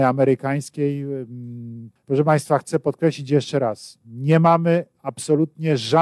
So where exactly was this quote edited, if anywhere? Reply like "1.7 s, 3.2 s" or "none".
none